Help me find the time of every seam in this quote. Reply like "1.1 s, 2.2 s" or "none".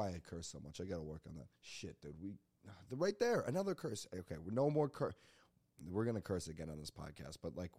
1.6 s